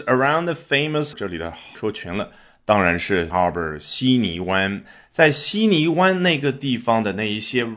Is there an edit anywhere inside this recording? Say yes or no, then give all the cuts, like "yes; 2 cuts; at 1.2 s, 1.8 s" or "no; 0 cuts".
yes; 3 cuts; at 1.1 s, 1.7 s, 3.3 s